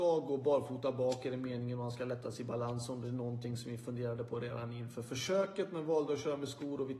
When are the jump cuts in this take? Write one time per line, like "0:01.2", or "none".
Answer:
none